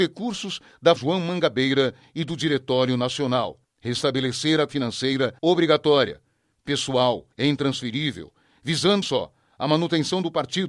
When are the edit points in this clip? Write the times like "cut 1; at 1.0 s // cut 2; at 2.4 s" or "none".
cut 1; at 1.0 s // cut 2; at 3.6 s // cut 3; at 4.7 s // cut 4; at 5.4 s // cut 5; at 7.3 s // cut 6; at 9.0 s

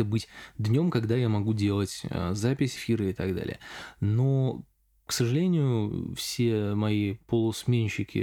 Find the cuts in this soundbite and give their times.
cut 1; at 2.8 s

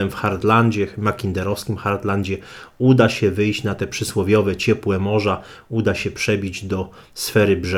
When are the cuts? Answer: none

